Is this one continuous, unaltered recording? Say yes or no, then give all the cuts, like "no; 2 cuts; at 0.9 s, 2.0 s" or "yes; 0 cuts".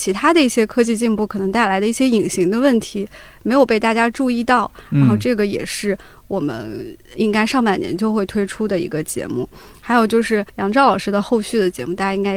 no; 1 cut; at 10.5 s